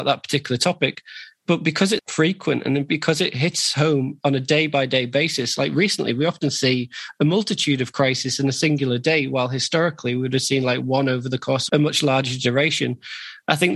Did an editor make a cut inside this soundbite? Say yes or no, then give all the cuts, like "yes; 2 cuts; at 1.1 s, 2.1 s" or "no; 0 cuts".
yes; 2 cuts; at 2.0 s, 11.7 s